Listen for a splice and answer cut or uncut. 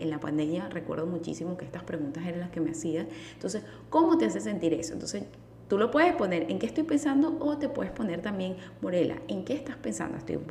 uncut